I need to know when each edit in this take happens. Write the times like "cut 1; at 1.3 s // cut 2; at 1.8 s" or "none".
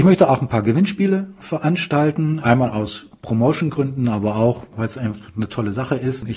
none